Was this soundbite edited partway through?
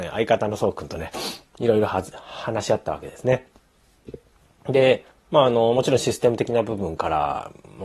yes; 1 cut; at 5.1 s

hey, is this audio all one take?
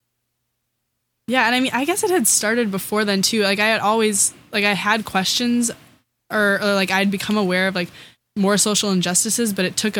yes; 0 cuts

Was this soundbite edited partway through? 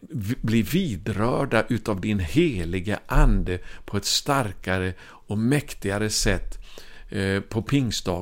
no; 0 cuts

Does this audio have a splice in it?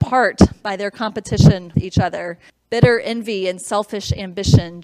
yes; 2 cuts; at 1.7 s, 2.5 s

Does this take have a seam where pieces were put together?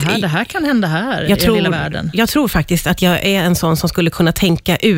no; 0 cuts

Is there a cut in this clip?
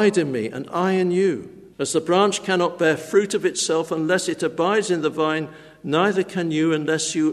yes; 1 cut; at 1.7 s

